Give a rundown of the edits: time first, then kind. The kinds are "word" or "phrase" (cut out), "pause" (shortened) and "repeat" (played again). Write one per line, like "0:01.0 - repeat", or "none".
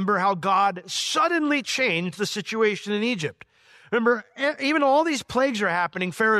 none